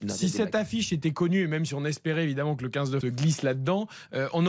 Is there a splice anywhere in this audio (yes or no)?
yes